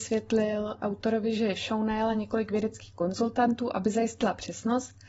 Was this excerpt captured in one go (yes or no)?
yes